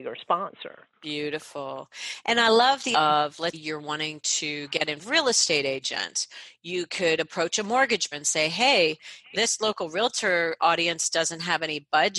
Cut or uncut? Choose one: cut